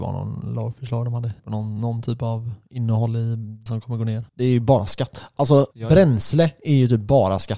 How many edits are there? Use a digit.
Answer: 4